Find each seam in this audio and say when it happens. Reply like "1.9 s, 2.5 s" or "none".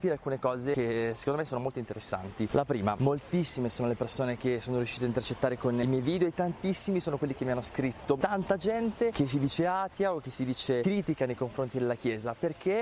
none